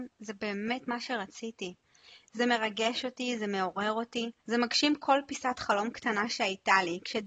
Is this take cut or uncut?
cut